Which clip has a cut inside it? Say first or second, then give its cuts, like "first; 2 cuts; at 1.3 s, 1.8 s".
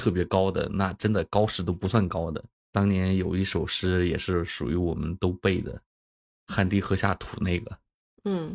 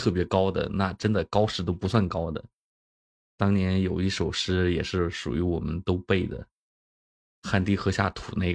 first; 2 cuts; at 2.5 s, 5.9 s